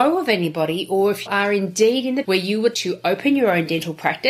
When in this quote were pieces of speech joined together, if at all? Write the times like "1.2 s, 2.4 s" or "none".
1.3 s, 2.2 s, 2.7 s